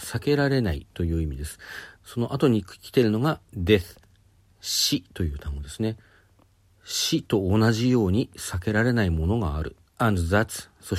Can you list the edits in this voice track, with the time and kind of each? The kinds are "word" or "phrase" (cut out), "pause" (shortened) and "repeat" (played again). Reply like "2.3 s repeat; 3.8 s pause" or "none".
1.9 s pause; 3.4 s pause